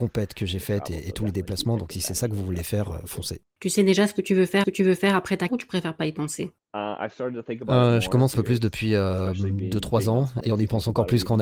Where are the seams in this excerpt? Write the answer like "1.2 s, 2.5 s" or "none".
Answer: 3.5 s, 4.6 s, 5.5 s, 6.6 s, 8.3 s, 10.4 s